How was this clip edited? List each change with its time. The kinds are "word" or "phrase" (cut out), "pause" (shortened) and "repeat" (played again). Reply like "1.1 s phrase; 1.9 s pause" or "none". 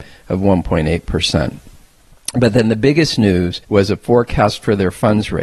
3.6 s pause; 4.0 s pause